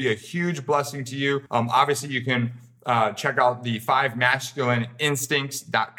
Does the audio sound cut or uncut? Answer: cut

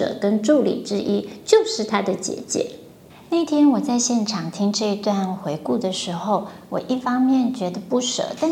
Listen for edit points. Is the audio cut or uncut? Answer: uncut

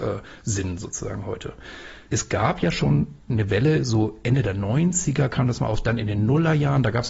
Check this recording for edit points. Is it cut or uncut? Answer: uncut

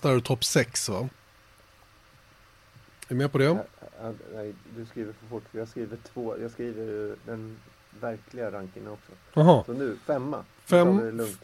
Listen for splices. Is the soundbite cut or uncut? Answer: uncut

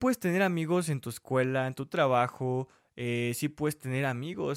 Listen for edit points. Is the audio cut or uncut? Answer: uncut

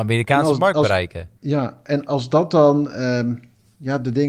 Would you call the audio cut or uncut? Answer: cut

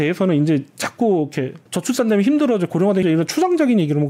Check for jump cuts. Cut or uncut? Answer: cut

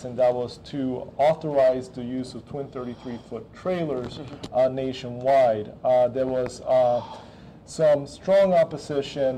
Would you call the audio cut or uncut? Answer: uncut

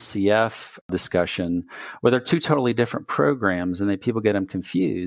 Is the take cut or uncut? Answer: uncut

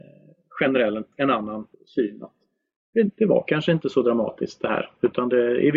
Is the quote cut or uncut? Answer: cut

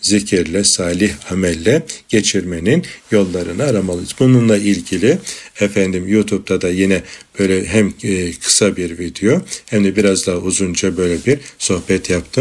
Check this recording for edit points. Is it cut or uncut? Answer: uncut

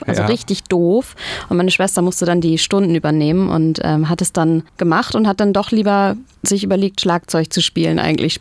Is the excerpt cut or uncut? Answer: cut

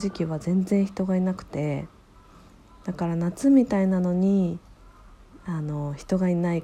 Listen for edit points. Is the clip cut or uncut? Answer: uncut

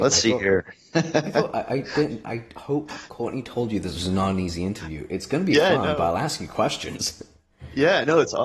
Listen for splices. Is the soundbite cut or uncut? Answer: uncut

